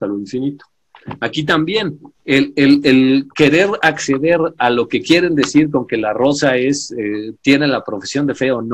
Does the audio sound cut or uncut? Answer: cut